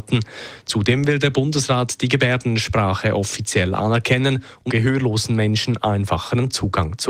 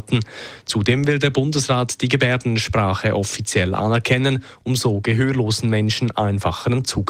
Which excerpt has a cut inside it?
first; 1 cut; at 4.7 s

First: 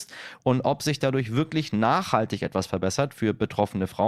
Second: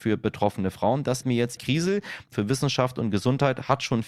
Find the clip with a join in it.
second; 3 cuts; at 1.2 s, 1.6 s, 2.3 s

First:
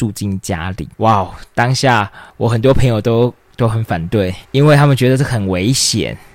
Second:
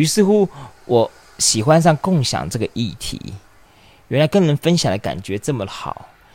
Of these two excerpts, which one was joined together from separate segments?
first; 3 cuts; at 0.9 s, 2.3 s, 4.4 s

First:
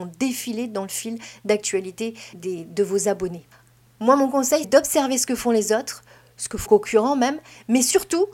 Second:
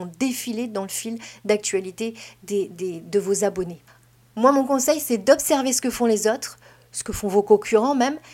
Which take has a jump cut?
first; 3 cuts; at 2.3 s, 4.6 s, 6.7 s

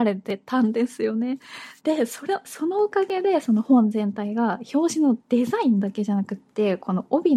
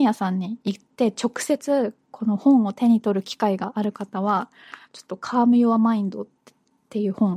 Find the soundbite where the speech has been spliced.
first; 1 cut; at 1.8 s

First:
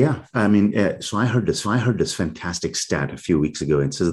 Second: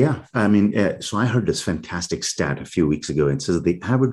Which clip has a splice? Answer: first; 1 cut; at 1.6 s

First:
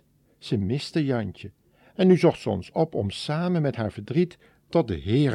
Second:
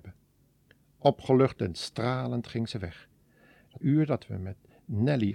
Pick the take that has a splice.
second; 1 cut; at 3.8 s

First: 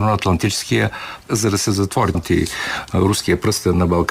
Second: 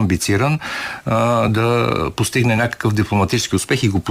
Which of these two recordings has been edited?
first; 2 cuts; at 1.3 s, 2.1 s

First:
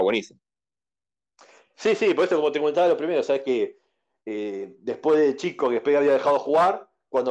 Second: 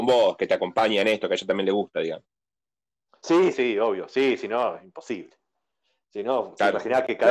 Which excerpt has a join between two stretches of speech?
second; 1 cut; at 3.5 s

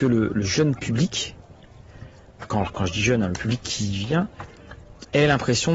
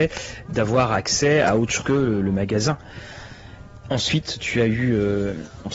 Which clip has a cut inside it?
second; 1 cut; at 1.8 s

